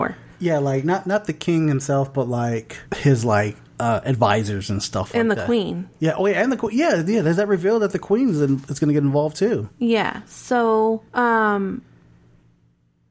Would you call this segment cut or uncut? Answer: cut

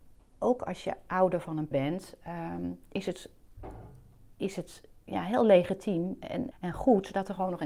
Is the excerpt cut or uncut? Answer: cut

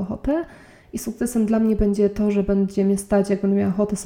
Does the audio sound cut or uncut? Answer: uncut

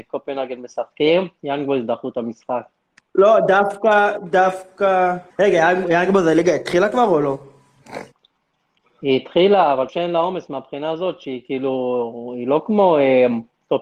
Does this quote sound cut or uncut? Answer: cut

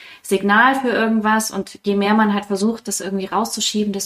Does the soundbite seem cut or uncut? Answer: uncut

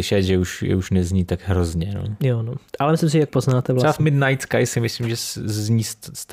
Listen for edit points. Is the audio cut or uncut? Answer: cut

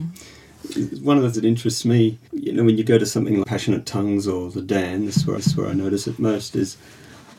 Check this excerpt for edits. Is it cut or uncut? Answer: cut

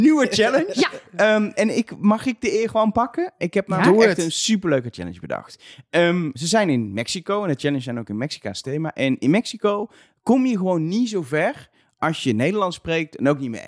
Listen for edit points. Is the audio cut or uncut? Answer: uncut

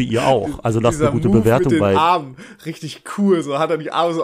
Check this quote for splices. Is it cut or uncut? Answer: uncut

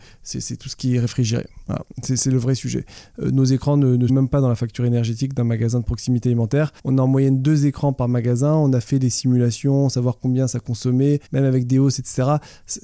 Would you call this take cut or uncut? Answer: cut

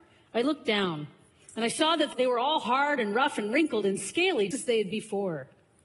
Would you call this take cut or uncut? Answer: cut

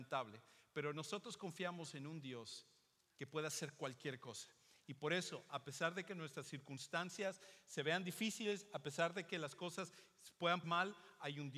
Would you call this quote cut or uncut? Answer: cut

